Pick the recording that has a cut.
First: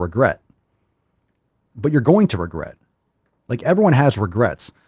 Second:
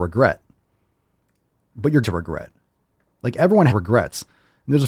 second; 2 cuts; at 2.0 s, 3.7 s

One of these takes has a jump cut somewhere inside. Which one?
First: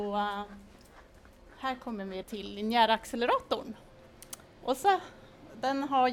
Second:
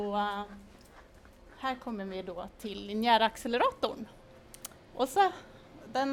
first; 1 cut; at 2.2 s

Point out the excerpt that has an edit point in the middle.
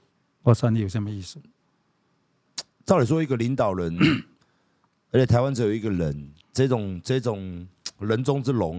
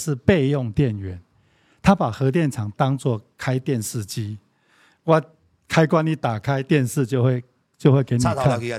first; 1 cut; at 6.4 s

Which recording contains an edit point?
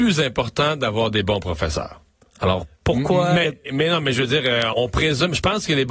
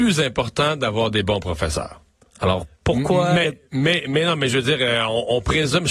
first; 2 cuts; at 3.7 s, 4.7 s

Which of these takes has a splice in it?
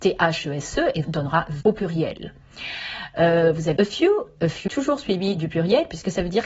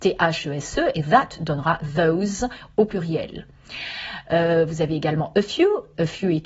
first; 4 cuts; at 1.0 s, 1.6 s, 3.8 s, 4.7 s

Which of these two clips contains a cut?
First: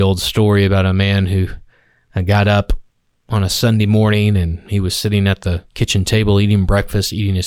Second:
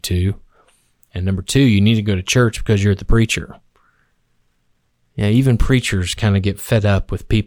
first; 1 cut; at 5.7 s

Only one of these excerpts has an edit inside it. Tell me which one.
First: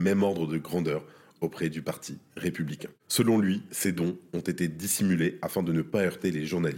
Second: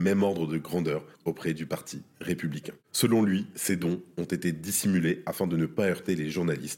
second; 1 cut; at 1.1 s

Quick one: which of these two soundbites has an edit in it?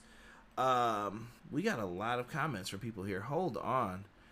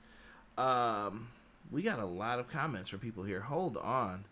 first; 1 cut; at 1.4 s

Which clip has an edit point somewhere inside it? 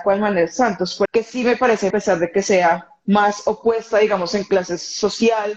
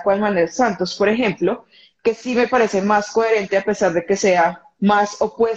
first; 2 cuts; at 1.1 s, 1.9 s

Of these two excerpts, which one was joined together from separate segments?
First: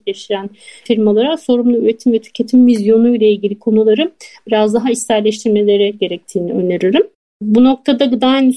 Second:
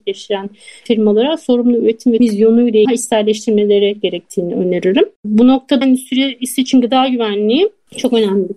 second; 4 cuts; at 2.2 s, 2.8 s, 5.1 s, 5.8 s

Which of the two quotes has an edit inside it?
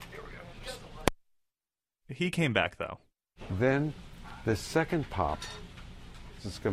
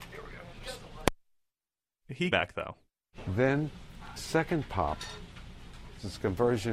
second; 2 cuts; at 2.3 s, 4.2 s

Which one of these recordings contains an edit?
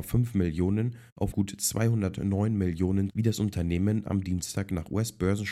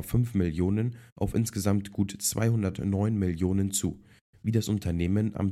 first; 2 cuts; at 1.3 s, 3.1 s

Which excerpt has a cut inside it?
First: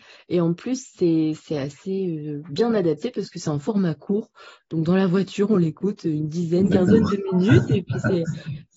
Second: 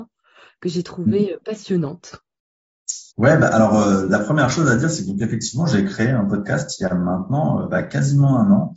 second; 1 cut; at 3.1 s

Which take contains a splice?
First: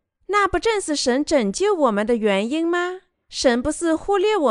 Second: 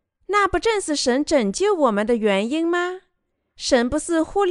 first; 1 cut; at 3.1 s

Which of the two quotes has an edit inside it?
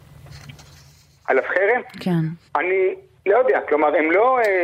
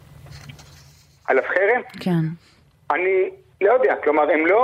first; 1 cut; at 2.5 s

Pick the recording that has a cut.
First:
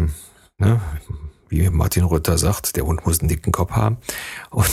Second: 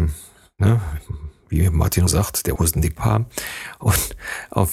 second; 3 cuts; at 2.1 s, 2.6 s, 3.0 s

